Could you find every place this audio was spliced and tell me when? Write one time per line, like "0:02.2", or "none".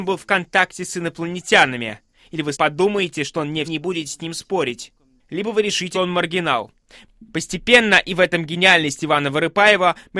0:02.5
0:03.6
0:05.9